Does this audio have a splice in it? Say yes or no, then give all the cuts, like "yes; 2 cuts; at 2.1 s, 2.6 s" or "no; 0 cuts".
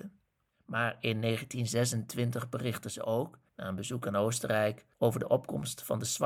yes; 2 cuts; at 3.5 s, 4.9 s